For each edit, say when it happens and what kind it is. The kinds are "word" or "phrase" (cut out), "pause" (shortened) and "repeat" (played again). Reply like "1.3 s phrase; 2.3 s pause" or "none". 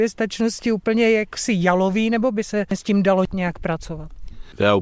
none